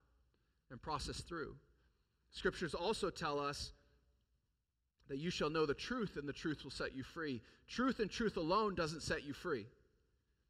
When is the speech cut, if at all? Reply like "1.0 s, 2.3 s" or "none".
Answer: none